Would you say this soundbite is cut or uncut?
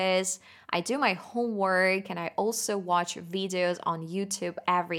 uncut